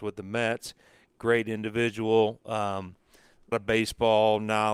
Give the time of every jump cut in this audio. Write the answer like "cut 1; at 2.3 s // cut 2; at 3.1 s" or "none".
cut 1; at 3.5 s